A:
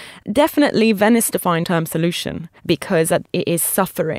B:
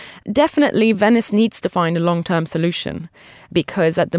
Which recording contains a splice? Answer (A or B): A